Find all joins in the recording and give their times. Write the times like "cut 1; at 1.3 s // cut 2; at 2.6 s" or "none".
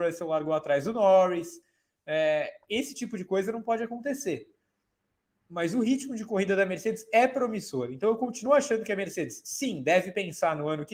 none